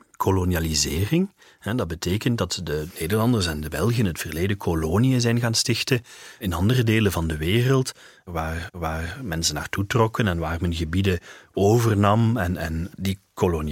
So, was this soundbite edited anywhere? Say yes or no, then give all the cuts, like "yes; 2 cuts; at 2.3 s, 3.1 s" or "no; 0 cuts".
yes; 1 cut; at 8.7 s